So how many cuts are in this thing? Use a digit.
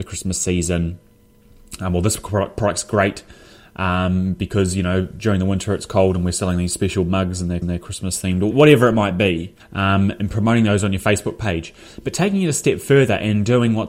3